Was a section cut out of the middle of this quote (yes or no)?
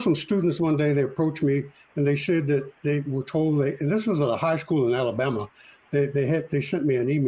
no